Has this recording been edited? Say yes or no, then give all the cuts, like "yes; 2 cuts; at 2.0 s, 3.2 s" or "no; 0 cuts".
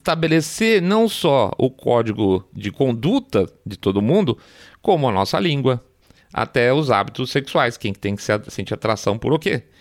no; 0 cuts